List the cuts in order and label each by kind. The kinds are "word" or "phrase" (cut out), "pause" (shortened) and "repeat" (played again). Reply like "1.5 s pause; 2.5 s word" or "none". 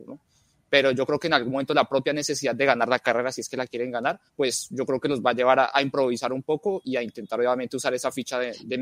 4.3 s pause